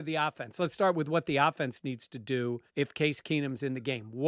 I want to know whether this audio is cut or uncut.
cut